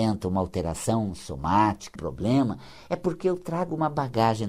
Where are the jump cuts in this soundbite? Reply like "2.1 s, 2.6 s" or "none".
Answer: 1.9 s